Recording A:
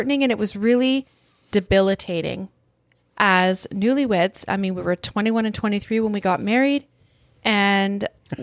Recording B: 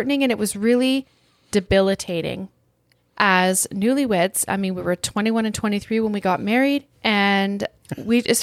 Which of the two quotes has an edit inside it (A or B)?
B